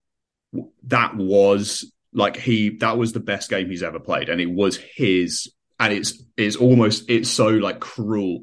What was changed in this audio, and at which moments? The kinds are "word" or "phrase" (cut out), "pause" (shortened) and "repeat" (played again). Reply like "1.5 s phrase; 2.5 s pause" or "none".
5.6 s pause